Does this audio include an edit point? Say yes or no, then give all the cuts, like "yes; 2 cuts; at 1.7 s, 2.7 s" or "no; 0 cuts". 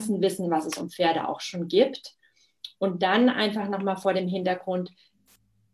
no; 0 cuts